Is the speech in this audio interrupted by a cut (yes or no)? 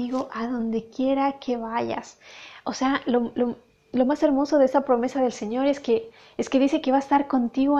no